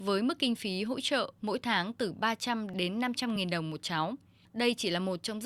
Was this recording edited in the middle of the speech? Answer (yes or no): no